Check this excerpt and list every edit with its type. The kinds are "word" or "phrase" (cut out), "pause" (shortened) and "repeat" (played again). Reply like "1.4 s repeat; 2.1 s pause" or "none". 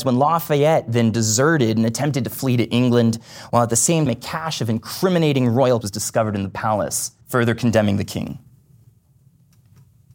4.1 s word; 5.8 s word; 7.2 s pause